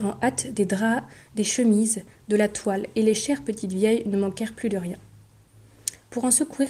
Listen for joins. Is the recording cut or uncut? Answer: uncut